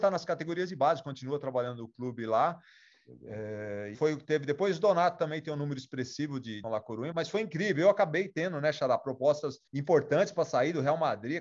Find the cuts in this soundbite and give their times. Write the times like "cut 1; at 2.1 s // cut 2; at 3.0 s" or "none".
cut 1; at 3.9 s // cut 2; at 6.6 s // cut 3; at 7.1 s // cut 4; at 9.7 s